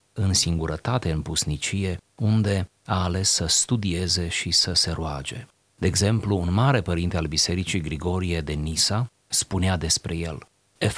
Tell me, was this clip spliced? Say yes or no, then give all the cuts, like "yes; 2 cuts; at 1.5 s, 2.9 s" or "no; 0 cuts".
no; 0 cuts